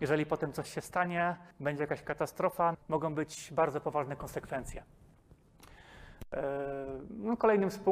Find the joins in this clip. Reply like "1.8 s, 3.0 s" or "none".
1.5 s, 2.7 s